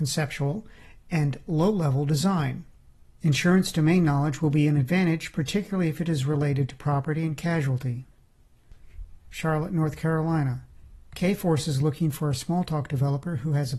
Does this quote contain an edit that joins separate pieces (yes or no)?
no